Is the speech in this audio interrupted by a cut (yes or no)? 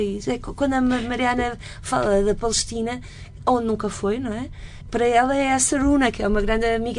no